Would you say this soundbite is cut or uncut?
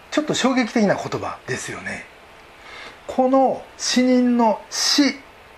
cut